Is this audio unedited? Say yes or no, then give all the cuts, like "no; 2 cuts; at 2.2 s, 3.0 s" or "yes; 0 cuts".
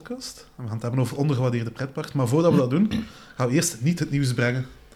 yes; 0 cuts